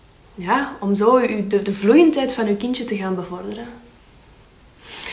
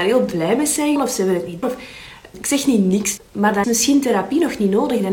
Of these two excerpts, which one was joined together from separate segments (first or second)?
second